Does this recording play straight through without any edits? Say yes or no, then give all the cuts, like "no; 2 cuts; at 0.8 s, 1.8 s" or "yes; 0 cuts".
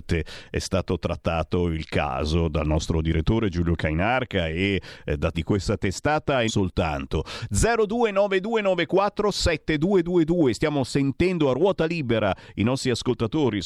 no; 2 cuts; at 5.3 s, 6.5 s